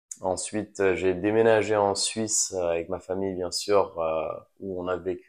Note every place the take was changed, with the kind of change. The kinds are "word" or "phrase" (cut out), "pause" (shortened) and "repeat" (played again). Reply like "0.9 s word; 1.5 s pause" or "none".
none